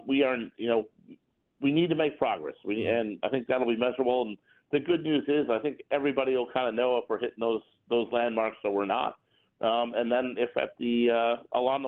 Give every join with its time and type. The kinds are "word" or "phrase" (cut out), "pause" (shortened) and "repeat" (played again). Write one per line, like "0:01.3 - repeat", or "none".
none